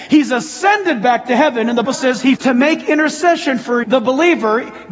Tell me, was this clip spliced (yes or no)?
yes